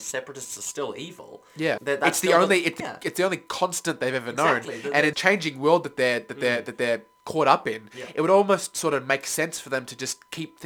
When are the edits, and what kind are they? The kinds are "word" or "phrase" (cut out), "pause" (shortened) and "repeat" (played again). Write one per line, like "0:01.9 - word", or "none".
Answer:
0:01.8 - word
0:02.8 - word
0:05.1 - word